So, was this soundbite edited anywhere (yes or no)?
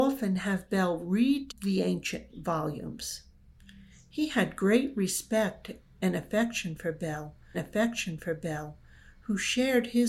yes